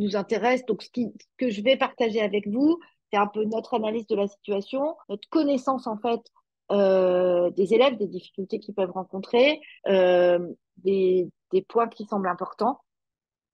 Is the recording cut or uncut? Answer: cut